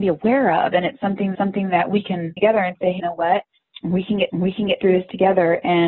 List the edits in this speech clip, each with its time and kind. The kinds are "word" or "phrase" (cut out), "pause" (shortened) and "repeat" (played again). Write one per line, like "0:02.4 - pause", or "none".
0:01.3 - repeat
0:02.4 - word
0:03.0 - word
0:04.3 - repeat